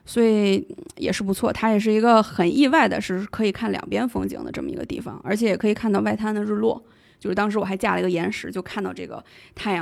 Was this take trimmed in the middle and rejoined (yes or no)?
no